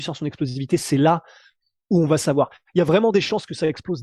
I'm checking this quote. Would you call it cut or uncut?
uncut